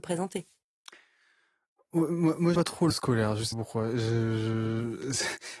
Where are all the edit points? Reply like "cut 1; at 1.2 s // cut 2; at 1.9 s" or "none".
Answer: cut 1; at 2.5 s // cut 2; at 2.9 s // cut 3; at 3.5 s